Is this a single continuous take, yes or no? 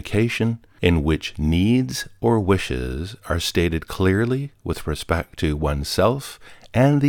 yes